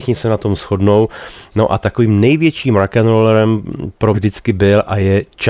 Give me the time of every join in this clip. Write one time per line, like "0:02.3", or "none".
0:04.1